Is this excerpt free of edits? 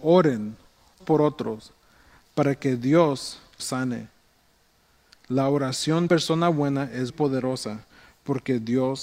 no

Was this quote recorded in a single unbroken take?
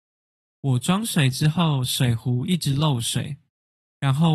yes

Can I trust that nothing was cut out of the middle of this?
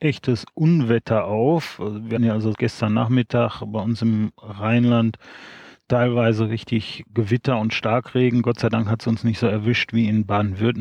no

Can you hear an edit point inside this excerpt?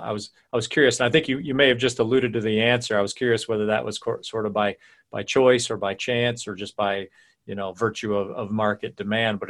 no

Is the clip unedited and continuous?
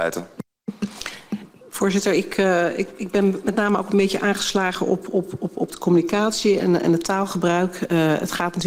yes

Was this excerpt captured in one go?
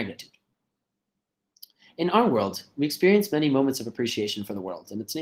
yes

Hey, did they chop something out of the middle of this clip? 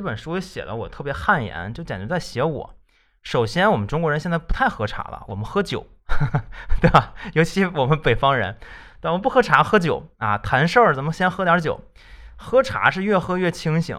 no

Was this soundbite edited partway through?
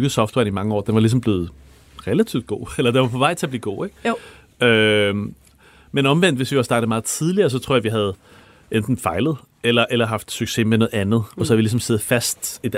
no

